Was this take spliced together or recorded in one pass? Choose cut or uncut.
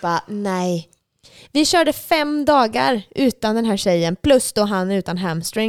uncut